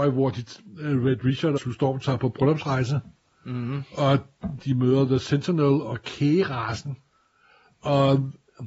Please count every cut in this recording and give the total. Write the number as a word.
one